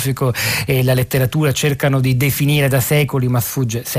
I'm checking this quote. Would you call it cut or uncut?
uncut